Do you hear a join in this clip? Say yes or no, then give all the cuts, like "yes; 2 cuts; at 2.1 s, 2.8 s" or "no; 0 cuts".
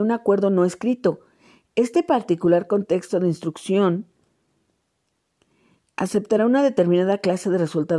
no; 0 cuts